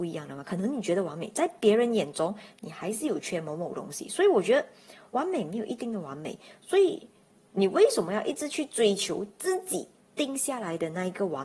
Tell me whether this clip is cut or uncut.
uncut